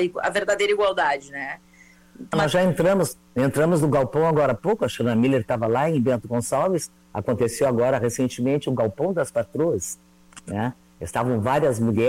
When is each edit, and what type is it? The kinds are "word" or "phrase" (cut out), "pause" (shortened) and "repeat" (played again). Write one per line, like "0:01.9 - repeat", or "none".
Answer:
0:02.3 - word